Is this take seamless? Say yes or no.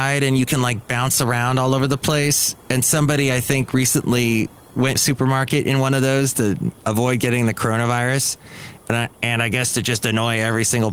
no